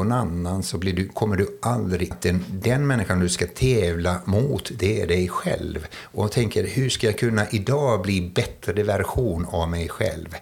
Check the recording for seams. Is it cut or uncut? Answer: cut